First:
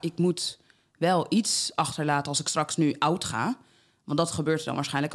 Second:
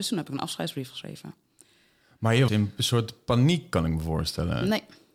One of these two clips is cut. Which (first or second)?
second